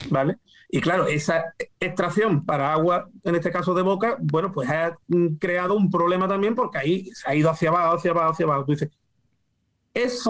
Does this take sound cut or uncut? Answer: uncut